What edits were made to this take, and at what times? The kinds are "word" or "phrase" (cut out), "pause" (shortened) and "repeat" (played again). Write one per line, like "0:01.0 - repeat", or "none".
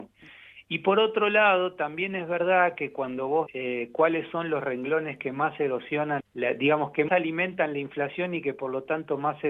0:03.5 - word
0:06.2 - word
0:07.1 - word

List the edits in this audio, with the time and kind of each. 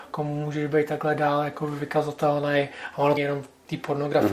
0:03.2 - word

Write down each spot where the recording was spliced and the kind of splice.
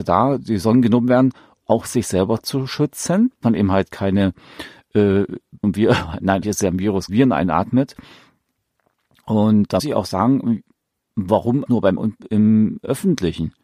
0:01.6 - word
0:03.4 - word
0:05.6 - word
0:06.4 - word
0:07.1 - word
0:09.8 - word
0:11.7 - word
0:12.0 - word

